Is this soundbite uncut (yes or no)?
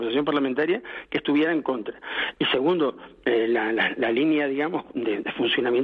yes